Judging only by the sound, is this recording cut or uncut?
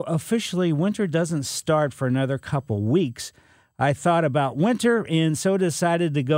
uncut